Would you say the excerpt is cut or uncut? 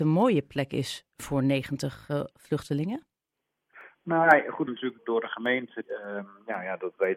cut